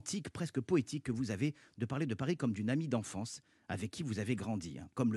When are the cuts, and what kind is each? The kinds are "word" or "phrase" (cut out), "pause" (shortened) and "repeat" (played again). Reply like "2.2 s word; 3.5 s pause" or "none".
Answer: none